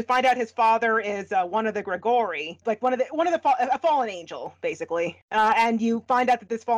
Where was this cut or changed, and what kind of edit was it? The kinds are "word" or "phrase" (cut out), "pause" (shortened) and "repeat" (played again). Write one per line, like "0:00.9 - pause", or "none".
0:02.6 - word